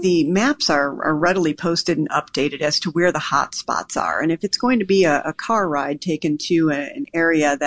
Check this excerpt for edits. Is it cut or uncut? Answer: uncut